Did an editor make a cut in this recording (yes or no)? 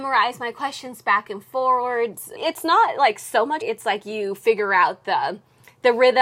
yes